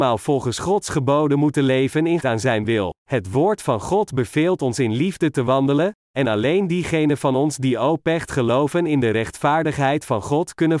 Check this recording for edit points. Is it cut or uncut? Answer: cut